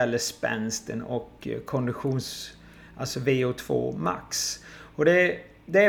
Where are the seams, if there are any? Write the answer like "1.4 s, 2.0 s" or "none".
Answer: none